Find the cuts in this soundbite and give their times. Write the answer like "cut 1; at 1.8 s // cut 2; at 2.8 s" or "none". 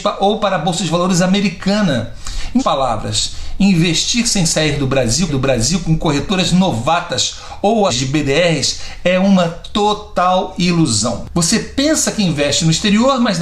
cut 1; at 2.6 s // cut 2; at 5.3 s // cut 3; at 7.9 s